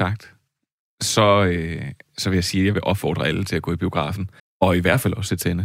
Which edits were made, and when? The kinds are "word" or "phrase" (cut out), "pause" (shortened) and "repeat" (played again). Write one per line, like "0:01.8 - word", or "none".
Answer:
0:04.4 - pause